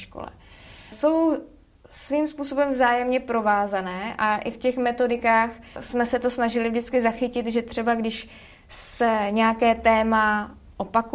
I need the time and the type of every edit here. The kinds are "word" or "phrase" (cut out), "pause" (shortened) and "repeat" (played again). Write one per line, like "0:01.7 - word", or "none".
none